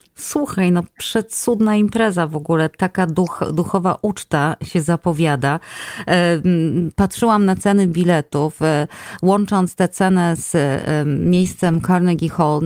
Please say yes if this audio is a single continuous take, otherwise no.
yes